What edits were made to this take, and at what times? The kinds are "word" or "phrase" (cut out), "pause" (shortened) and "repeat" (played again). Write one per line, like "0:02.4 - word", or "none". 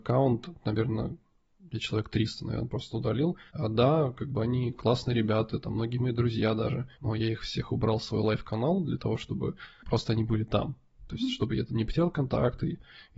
0:03.5 - pause
0:06.9 - pause